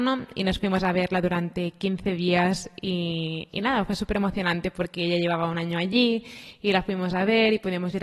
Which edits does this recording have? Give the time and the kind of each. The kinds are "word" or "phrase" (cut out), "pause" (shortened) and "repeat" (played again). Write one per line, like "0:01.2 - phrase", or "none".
none